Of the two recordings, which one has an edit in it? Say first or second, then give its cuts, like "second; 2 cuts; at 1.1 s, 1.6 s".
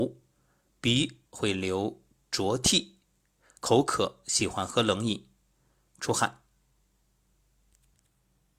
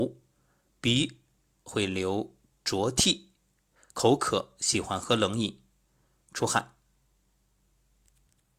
first; 1 cut; at 1.3 s